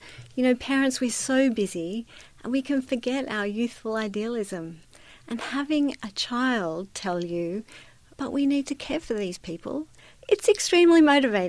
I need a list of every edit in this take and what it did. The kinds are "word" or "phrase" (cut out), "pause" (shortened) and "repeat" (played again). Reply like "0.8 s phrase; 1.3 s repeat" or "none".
none